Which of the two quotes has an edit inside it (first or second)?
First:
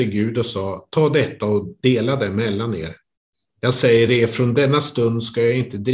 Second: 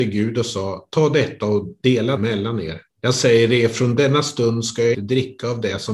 second